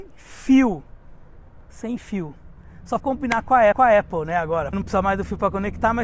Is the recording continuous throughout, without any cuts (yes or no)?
no